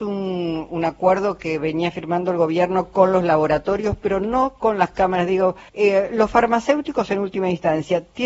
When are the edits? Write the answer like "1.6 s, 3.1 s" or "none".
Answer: 5.7 s